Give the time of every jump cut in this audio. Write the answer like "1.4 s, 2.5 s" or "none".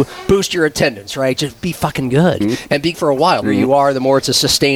2.4 s, 2.9 s, 3.4 s